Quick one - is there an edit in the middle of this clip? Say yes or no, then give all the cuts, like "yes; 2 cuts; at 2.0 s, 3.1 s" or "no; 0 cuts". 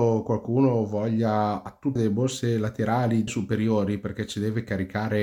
yes; 2 cuts; at 2.0 s, 3.3 s